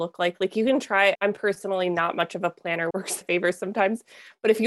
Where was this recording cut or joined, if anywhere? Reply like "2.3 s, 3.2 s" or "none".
1.1 s, 2.9 s, 3.2 s